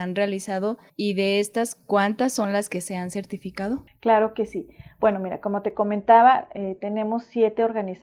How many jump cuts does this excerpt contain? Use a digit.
0